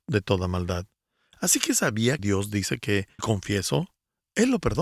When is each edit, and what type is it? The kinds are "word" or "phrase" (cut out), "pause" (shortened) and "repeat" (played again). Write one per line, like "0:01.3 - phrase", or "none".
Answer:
0:02.2 - word
0:03.2 - word

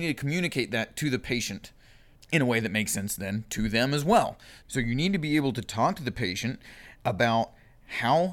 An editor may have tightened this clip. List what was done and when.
none

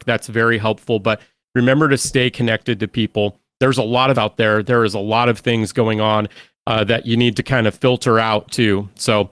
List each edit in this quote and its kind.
0:04.1 - word

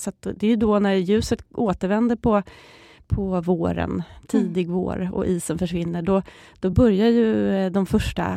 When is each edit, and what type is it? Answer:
none

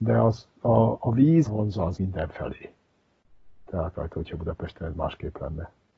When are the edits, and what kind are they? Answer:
0:01.5 - word
0:02.0 - word
0:03.9 - word

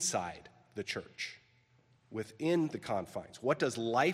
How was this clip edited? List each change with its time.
none

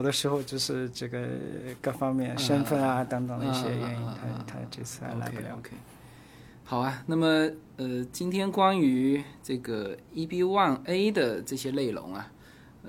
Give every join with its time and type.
none

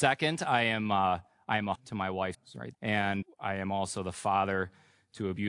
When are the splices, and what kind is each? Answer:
0:01.7 - word
0:02.3 - word
0:02.7 - word
0:03.2 - word

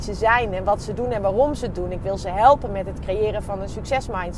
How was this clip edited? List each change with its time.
none

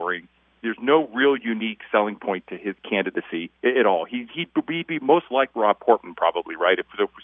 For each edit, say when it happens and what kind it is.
0:03.6 - pause

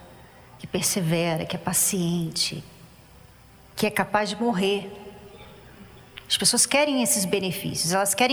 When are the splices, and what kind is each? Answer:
none

